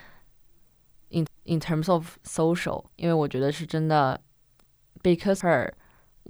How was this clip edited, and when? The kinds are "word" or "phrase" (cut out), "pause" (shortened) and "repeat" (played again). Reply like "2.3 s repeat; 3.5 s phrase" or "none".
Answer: 1.3 s repeat; 2.9 s pause; 5.4 s word